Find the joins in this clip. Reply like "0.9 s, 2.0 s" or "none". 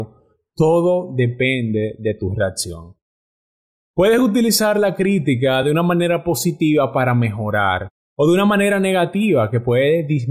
none